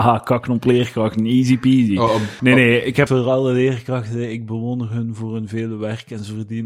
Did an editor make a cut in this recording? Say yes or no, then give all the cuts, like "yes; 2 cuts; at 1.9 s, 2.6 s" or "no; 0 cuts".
yes; 2 cuts; at 2.4 s, 3.1 s